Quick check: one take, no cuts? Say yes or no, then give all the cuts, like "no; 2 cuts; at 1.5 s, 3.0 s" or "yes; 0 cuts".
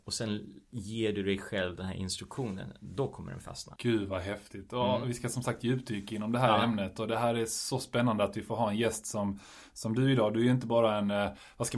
yes; 0 cuts